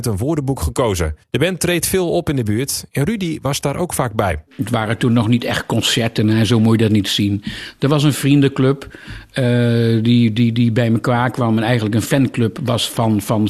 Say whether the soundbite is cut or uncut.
cut